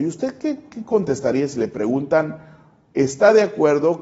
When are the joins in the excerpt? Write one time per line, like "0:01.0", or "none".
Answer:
none